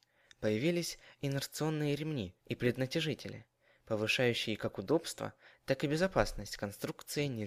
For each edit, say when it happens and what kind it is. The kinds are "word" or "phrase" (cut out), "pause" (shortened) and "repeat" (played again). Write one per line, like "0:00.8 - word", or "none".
0:02.4 - pause

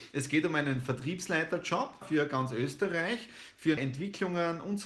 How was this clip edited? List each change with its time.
0:02.0 - word
0:03.8 - word

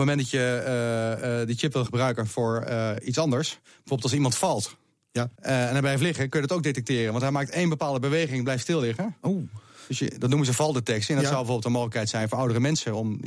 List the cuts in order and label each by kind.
0:01.9 - word
0:05.4 - pause

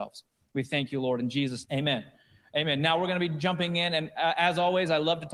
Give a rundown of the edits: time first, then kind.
0:01.6 - word

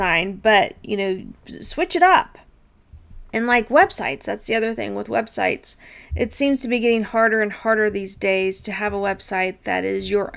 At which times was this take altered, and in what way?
0:03.3 - pause
0:06.0 - pause

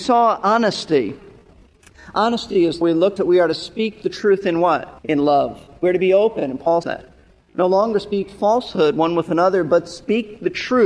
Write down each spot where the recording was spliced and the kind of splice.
0:02.8 - phrase
0:03.2 - phrase
0:05.0 - pause
0:06.8 - word

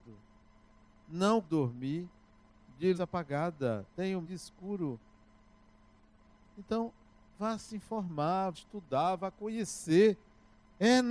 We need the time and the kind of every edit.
0:01.4 - word
0:02.9 - word
0:04.2 - word
0:08.5 - word

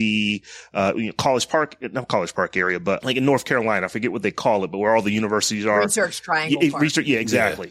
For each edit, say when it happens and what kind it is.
0:03.0 - word

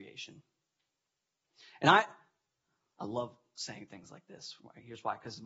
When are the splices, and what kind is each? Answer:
none

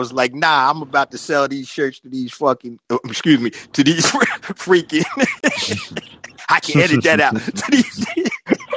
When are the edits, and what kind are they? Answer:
none

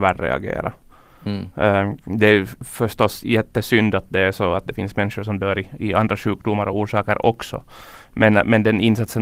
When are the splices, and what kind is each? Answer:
none

